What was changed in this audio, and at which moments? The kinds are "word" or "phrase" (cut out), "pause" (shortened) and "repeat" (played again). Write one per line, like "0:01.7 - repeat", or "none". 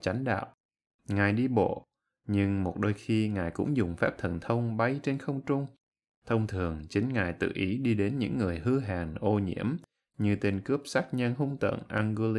none